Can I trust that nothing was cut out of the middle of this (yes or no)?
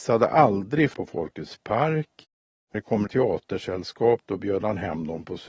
no